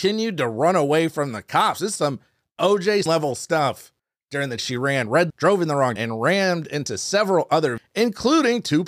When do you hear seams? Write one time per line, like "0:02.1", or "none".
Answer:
0:03.1
0:04.0
0:04.6
0:05.3
0:06.0
0:07.8